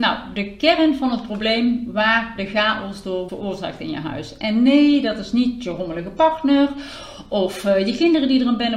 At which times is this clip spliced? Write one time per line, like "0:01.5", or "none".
0:03.3

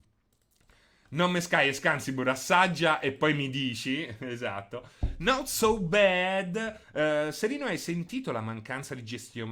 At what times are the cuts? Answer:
0:06.8

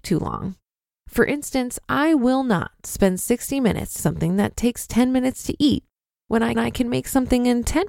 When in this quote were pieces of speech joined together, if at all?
0:04.0
0:06.5

